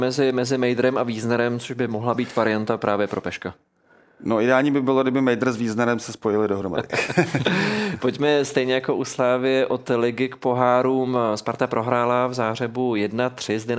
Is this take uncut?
yes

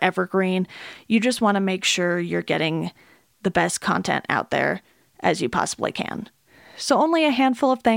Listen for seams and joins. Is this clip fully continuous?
yes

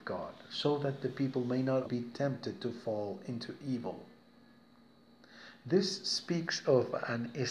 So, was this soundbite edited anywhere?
yes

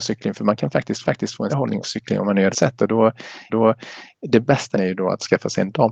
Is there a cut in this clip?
yes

